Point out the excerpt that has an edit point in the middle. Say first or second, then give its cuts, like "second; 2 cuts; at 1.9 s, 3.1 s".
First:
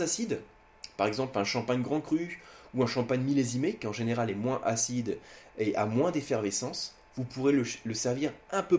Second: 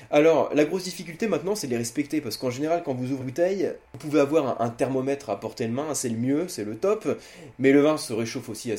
second; 1 cut; at 3.2 s